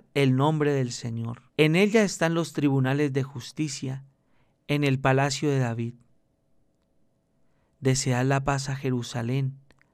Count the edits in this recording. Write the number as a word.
one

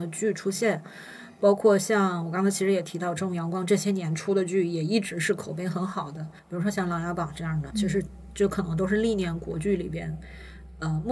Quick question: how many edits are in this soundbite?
two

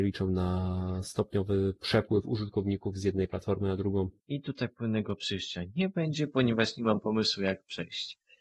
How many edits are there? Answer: one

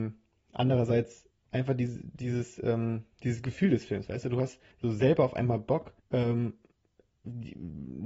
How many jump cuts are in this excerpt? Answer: two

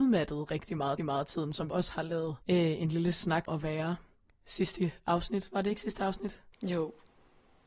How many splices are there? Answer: six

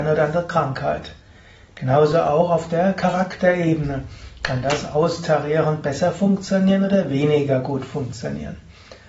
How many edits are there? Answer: zero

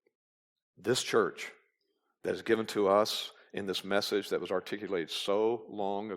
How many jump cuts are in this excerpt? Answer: zero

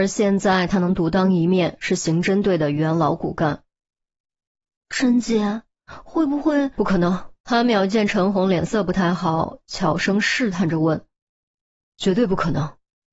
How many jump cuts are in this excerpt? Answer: one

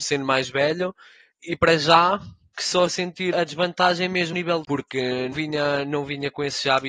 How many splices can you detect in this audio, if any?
seven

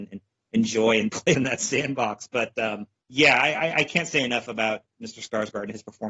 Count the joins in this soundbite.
two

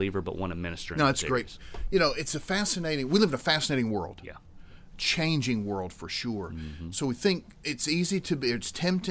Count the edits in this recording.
zero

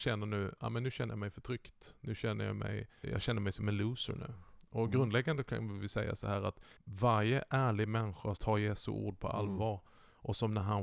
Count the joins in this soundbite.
three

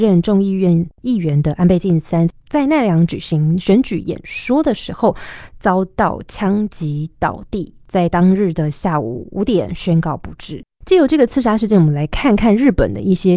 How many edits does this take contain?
one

